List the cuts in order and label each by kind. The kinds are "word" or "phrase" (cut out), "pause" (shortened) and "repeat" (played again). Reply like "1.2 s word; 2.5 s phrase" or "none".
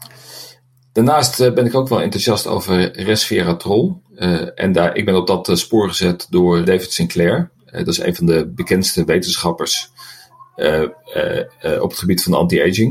6.7 s word